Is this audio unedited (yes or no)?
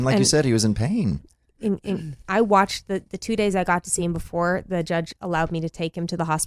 yes